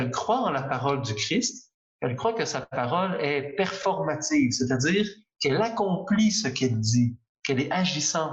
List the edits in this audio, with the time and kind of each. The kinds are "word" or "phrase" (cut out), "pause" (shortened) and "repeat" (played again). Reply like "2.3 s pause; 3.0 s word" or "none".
none